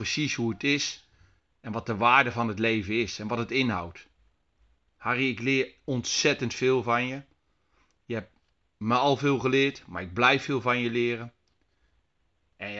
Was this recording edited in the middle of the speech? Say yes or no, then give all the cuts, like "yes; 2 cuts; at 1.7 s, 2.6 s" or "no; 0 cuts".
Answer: no; 0 cuts